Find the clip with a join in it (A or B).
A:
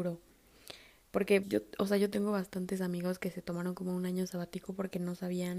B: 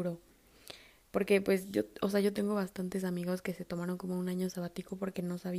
A